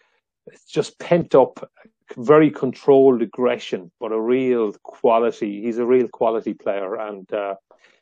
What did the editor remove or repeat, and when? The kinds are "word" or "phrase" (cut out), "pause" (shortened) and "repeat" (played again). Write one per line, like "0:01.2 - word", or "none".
none